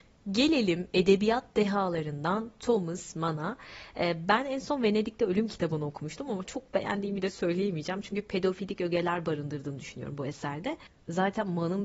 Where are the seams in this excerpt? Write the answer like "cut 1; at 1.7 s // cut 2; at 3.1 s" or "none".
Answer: none